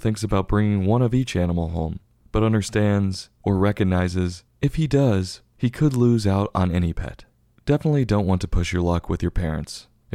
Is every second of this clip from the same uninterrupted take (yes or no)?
yes